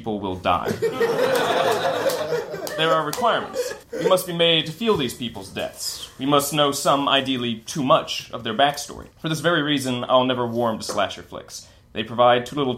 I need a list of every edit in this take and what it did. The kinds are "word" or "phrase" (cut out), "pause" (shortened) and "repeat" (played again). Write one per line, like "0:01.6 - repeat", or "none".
0:03.8 - pause
0:09.1 - pause